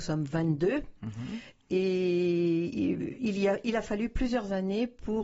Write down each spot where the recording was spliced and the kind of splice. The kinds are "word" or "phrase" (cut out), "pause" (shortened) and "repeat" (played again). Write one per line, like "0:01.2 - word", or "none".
none